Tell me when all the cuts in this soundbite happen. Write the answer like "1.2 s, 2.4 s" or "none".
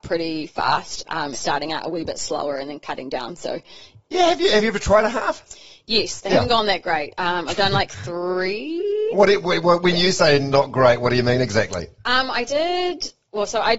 1.3 s